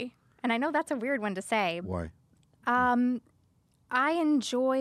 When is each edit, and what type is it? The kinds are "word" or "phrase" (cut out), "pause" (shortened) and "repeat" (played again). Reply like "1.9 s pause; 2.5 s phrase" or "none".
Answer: none